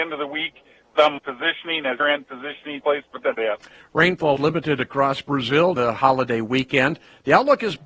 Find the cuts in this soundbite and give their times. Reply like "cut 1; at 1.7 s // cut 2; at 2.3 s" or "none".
cut 1; at 1.2 s // cut 2; at 2.0 s // cut 3; at 2.8 s // cut 4; at 3.4 s // cut 5; at 4.4 s // cut 6; at 5.8 s